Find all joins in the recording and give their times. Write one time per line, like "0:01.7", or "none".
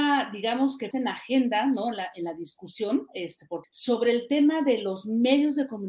0:00.9
0:03.6

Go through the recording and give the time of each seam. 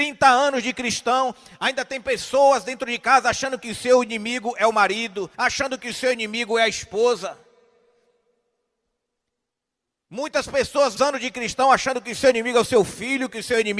0:05.3
0:11.0

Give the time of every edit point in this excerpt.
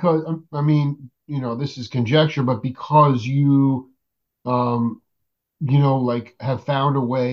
none

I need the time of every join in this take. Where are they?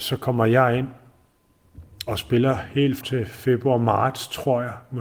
0:03.0

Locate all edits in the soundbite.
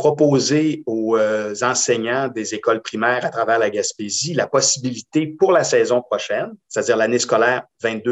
0:06.6

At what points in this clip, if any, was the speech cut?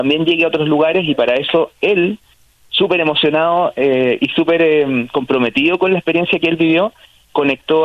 none

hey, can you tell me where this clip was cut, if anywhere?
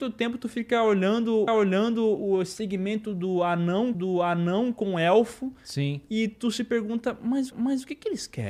0:01.5
0:03.9
0:07.5

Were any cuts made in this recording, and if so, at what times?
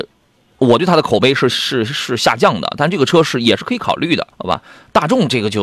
0:04.3

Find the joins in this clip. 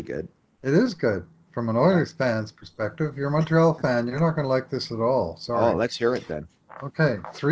none

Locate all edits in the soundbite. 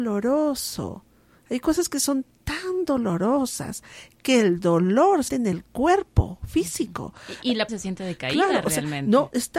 0:05.3
0:07.7

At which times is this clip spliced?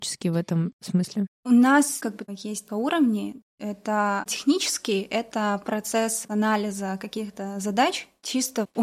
0:02.0
0:02.7
0:04.3

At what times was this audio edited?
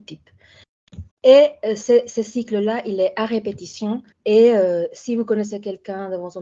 0:01.1
0:04.1

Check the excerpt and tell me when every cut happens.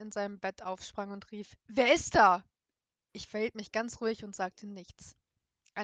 0:01.6

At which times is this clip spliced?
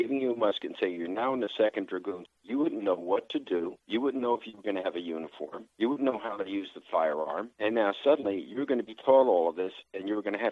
0:02.4
0:03.8
0:05.7
0:07.5

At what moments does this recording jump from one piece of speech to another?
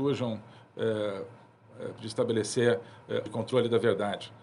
0:02.0
0:03.3

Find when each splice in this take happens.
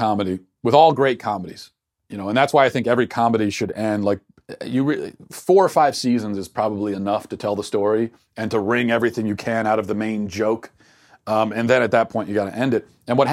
none

